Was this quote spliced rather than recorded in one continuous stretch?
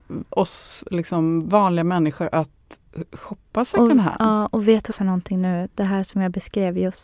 yes; 1 cut; at 4.9 s

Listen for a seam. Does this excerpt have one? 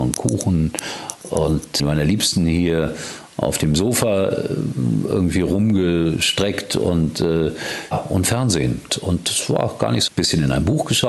yes; 4 cuts; at 1.8 s, 7.9 s, 8.9 s, 10.1 s

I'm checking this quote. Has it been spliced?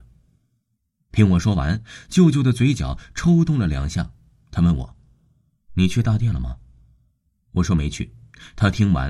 no; 0 cuts

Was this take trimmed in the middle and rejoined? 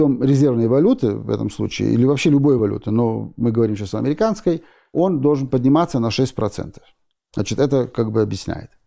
no; 0 cuts

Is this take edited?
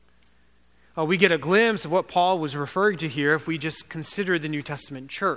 no; 0 cuts

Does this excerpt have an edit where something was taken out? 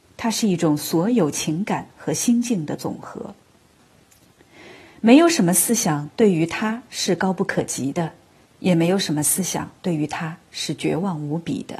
no; 0 cuts

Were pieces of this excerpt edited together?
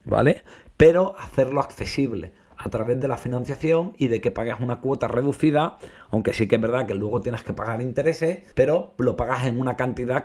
yes; 1 cut; at 8.5 s

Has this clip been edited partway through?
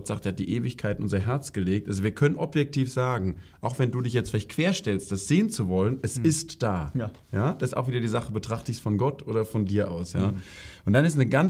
yes; 1 cut; at 7.2 s

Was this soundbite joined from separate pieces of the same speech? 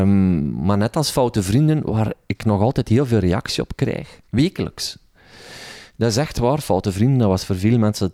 yes; 1 cut; at 4.3 s

